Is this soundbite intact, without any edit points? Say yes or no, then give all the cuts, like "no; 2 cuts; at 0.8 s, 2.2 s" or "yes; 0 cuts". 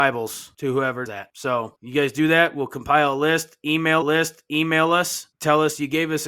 no; 2 cuts; at 1.1 s, 4.0 s